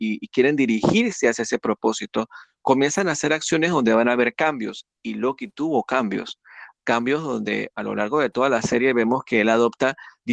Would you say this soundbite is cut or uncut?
uncut